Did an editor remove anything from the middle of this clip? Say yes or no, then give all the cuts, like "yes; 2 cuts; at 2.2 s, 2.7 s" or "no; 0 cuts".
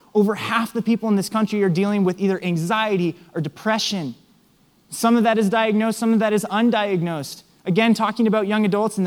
no; 0 cuts